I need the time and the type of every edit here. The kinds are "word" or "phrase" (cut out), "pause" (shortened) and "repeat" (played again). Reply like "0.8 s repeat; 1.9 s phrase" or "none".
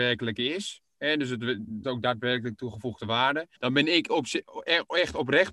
1.8 s word; 3.6 s pause